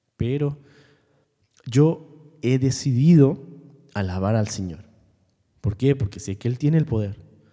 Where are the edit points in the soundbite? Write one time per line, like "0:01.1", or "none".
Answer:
none